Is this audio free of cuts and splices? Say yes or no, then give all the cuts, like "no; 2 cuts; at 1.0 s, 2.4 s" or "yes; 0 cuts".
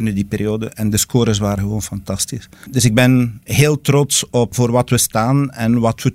no; 1 cut; at 1.6 s